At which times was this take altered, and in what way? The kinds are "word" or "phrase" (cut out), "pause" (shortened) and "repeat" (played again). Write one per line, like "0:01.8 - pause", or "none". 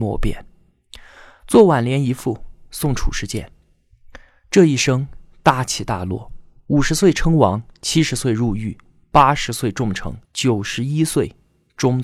0:10.2 - pause